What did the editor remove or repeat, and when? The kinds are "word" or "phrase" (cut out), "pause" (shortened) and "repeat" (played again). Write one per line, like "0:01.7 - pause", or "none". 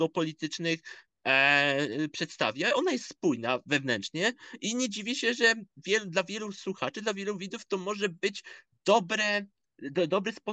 none